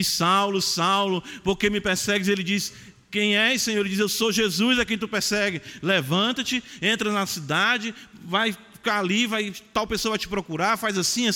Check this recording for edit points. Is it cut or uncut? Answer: uncut